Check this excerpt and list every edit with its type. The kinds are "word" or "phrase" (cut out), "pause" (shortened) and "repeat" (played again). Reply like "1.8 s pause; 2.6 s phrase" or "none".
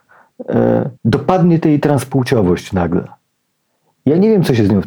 1.0 s pause